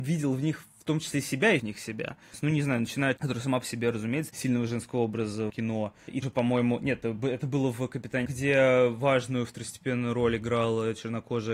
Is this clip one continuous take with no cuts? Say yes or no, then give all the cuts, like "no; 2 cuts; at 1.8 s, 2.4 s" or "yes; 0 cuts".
no; 6 cuts; at 1.6 s, 3.2 s, 4.3 s, 5.5 s, 6.2 s, 8.2 s